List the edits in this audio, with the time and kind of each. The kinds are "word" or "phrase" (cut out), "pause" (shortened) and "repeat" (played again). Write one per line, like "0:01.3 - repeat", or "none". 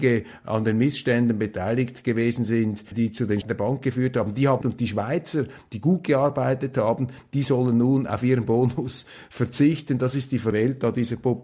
0:02.9 - word
0:03.4 - word
0:04.6 - phrase
0:10.5 - word